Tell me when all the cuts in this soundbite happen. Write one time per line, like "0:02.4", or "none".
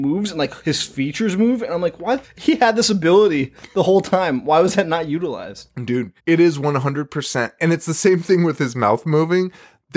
0:02.2
0:06.2